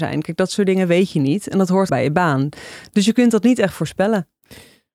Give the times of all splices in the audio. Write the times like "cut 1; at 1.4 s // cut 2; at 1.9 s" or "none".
cut 1; at 1.9 s